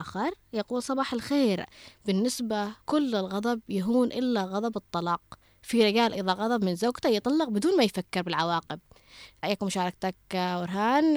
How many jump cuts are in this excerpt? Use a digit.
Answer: 2